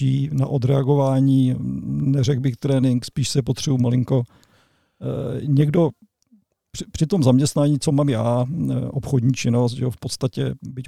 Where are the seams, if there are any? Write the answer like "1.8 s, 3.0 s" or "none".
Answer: none

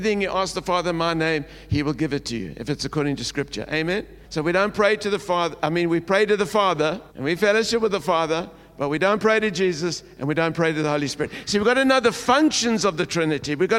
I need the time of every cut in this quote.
4.2 s, 7.1 s

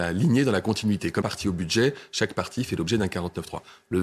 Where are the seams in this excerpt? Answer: 1.2 s

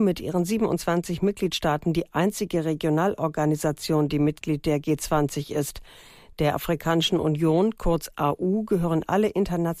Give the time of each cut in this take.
none

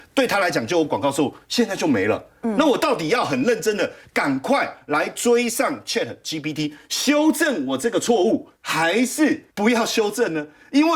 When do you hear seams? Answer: 8.6 s, 9.5 s

